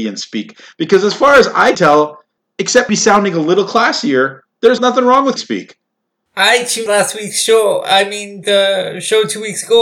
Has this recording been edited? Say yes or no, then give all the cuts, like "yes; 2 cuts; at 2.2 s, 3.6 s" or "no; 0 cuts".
yes; 6 cuts; at 1.7 s, 2.9 s, 4.8 s, 5.4 s, 6.9 s, 8.4 s